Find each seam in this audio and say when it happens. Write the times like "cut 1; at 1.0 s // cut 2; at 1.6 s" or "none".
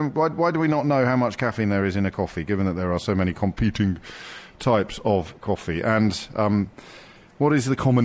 none